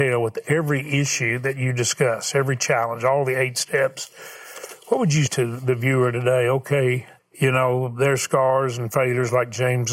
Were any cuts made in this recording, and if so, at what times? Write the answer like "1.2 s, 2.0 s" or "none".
5.3 s, 7.2 s